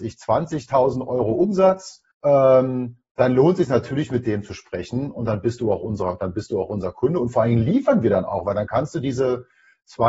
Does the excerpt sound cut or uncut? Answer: cut